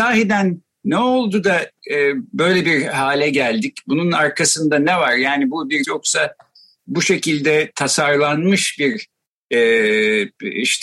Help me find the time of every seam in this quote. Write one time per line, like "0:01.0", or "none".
0:05.8